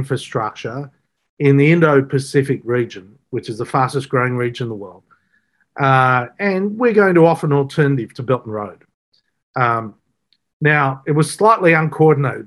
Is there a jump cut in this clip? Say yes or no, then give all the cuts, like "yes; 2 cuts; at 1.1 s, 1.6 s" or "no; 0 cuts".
no; 0 cuts